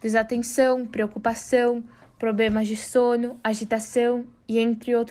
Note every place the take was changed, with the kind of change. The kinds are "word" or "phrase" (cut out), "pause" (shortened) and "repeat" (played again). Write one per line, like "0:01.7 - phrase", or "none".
none

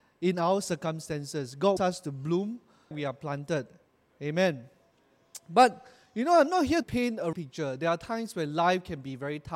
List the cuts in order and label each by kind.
0:01.8 - word
0:02.9 - word
0:06.8 - word
0:07.3 - word

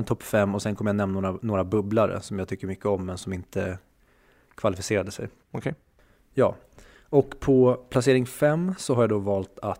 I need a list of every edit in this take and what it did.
none

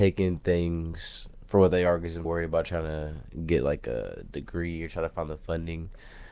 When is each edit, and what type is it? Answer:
0:02.2 - word

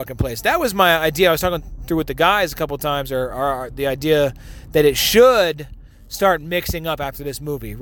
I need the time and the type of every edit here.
none

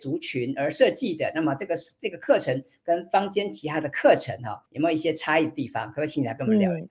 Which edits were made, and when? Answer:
0:04.7 - pause

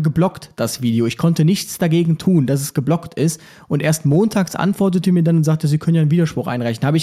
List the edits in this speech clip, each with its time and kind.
none

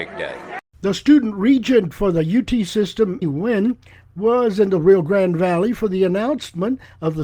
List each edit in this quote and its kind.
0:03.2 - word

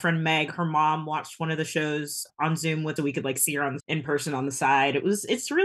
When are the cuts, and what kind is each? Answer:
0:02.3 - word
0:03.0 - word
0:03.8 - word

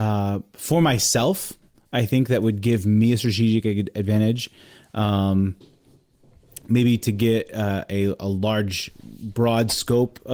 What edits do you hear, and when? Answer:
none

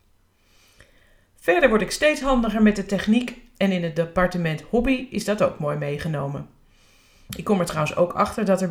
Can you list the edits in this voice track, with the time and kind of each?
none

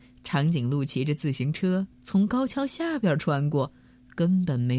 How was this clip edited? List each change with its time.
0:01.9 - pause

